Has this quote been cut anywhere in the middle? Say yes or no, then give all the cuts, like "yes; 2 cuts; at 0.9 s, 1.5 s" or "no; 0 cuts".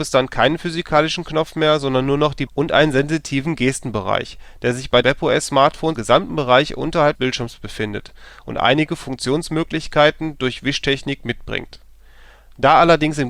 yes; 4 cuts; at 2.5 s, 5.0 s, 6.0 s, 7.2 s